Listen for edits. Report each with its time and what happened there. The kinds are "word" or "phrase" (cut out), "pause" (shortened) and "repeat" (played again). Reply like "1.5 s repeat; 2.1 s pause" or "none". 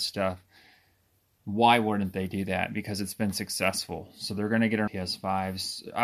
4.9 s word

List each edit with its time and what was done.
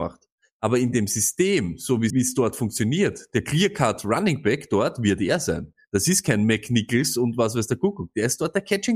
2.1 s word

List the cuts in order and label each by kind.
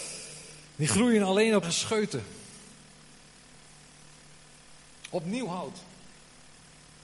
1.6 s word

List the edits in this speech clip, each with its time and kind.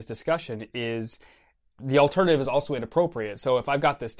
none

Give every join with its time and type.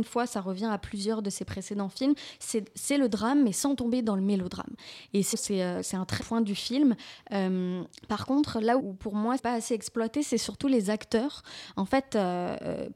5.3 s word; 6.2 s word; 7.9 s pause; 8.8 s word; 9.4 s word

